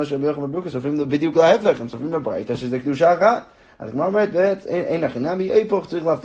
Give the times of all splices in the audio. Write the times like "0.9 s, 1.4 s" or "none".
none